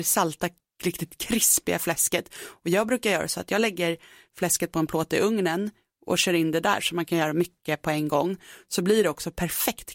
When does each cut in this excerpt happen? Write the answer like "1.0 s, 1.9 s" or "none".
none